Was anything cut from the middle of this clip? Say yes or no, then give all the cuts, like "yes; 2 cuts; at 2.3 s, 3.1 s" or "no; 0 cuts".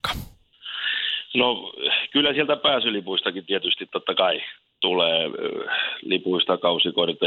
no; 0 cuts